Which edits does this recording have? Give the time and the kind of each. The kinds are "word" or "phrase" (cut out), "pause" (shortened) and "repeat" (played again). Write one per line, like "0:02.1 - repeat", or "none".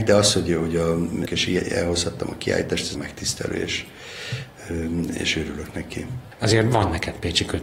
0:01.3 - phrase
0:02.9 - word